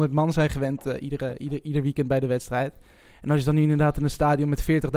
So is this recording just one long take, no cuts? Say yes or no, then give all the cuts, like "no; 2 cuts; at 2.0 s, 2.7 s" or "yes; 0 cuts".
yes; 0 cuts